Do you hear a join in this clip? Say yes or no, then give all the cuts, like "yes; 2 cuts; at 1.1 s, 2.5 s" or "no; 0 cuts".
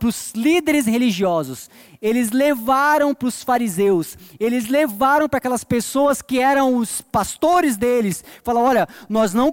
no; 0 cuts